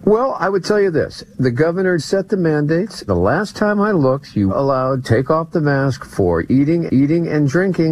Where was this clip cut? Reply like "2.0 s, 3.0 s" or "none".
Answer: 2.0 s, 3.1 s, 4.5 s, 5.0 s, 6.9 s